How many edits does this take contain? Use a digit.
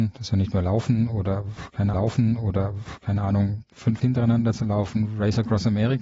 2